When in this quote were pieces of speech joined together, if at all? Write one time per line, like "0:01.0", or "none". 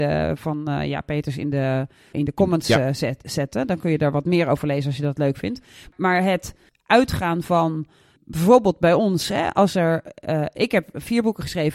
none